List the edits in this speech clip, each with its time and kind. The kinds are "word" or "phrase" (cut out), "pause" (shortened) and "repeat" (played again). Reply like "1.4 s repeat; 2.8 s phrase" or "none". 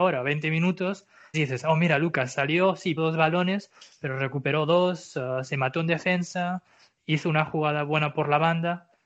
1.3 s word; 3.0 s word